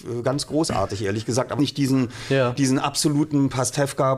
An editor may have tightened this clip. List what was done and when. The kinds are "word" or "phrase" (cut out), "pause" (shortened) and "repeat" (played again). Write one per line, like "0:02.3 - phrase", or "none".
0:01.6 - phrase